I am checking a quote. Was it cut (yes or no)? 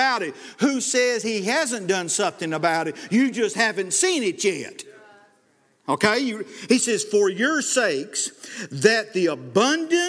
no